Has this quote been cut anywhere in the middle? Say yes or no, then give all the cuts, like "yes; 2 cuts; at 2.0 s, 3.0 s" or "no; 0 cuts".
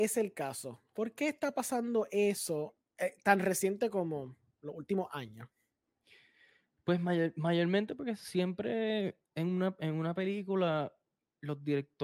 no; 0 cuts